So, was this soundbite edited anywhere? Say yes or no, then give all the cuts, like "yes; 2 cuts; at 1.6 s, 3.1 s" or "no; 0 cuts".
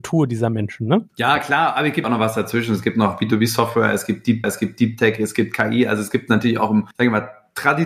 yes; 3 cuts; at 2.0 s, 4.4 s, 6.9 s